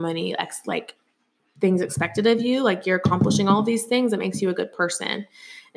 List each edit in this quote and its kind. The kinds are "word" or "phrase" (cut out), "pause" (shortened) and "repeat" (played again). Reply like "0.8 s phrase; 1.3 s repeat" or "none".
1.1 s pause